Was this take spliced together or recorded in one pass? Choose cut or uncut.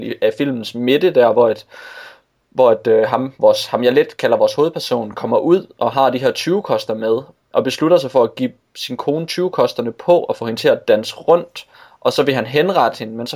uncut